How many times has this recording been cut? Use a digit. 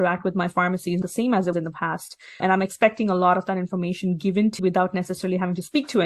4